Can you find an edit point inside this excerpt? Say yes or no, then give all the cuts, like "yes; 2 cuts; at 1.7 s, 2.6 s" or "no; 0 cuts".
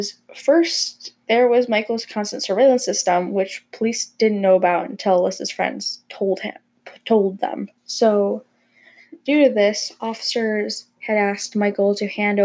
yes; 1 cut; at 7.8 s